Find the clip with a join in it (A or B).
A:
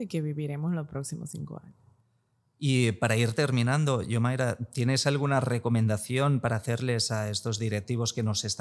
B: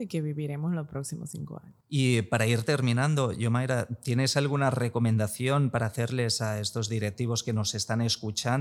B